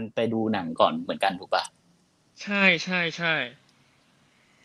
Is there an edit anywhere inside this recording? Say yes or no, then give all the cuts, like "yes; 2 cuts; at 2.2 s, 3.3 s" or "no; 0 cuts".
no; 0 cuts